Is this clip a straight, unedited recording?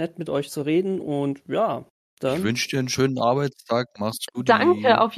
yes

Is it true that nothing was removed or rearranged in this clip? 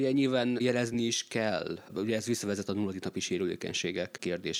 yes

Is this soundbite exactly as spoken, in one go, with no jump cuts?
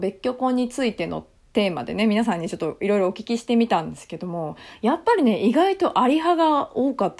yes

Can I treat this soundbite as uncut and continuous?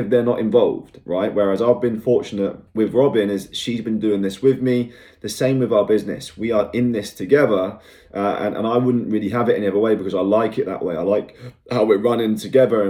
no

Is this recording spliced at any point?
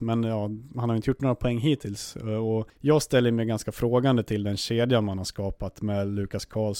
no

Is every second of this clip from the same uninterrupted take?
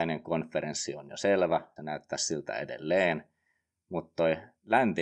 no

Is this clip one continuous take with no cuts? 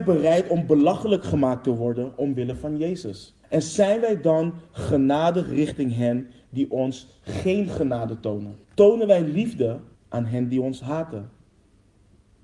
no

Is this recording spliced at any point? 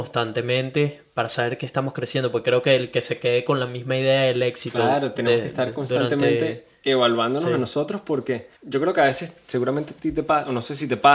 yes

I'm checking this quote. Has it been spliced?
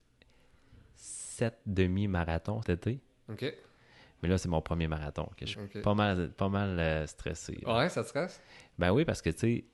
yes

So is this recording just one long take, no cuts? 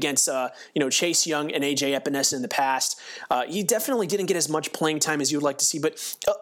yes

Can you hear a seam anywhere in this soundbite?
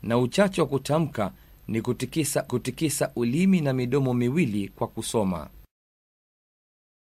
yes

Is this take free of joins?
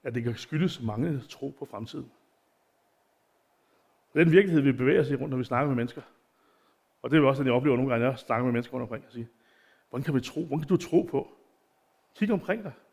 yes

